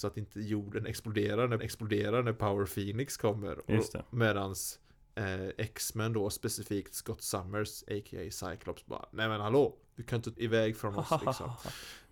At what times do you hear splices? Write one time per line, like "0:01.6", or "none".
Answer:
0:01.6
0:10.3